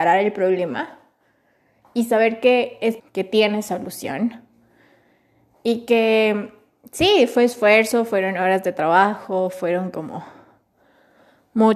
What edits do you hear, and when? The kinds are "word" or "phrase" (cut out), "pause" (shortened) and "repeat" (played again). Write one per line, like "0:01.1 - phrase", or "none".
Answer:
0:03.0 - word